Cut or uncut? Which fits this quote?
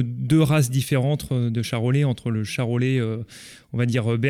uncut